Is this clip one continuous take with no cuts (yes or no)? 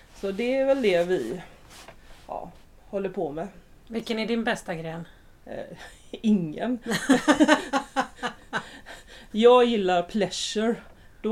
no